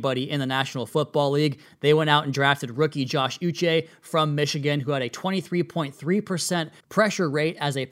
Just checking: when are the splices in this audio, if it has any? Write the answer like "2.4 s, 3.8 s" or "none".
6.8 s